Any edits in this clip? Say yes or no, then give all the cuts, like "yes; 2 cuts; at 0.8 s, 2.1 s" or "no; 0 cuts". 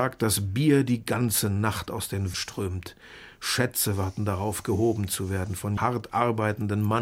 yes; 2 cuts; at 2.3 s, 5.8 s